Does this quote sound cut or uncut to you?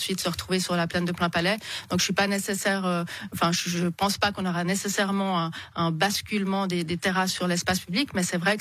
uncut